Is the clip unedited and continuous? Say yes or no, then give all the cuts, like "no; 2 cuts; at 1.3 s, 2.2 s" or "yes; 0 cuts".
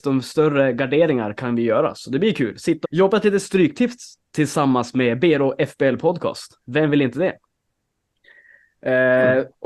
no; 1 cut; at 2.8 s